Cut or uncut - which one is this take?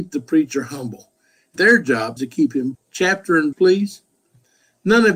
cut